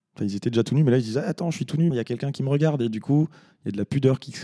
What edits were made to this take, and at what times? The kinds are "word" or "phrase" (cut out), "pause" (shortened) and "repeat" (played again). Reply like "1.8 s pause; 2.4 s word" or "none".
1.9 s word